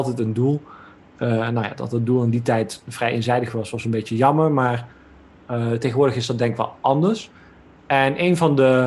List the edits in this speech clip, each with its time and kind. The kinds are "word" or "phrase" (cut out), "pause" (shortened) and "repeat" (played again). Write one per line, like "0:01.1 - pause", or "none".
none